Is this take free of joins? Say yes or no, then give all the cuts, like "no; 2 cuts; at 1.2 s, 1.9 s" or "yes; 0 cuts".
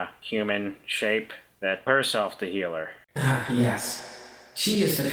no; 1 cut; at 1.9 s